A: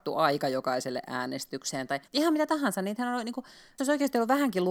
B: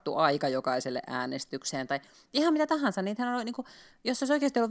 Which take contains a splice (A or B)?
A